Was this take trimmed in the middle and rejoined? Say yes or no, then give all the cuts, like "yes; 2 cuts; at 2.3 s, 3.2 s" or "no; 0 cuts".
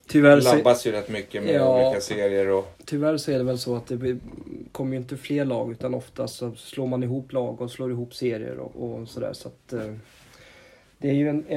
yes; 1 cut; at 2.7 s